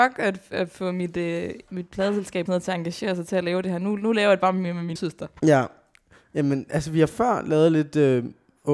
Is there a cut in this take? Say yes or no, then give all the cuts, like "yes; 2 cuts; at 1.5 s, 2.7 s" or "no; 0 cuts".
yes; 2 cuts; at 2.5 s, 5.0 s